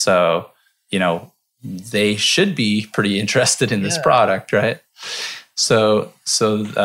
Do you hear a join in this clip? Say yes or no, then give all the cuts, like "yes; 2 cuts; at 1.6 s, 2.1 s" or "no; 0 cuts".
no; 0 cuts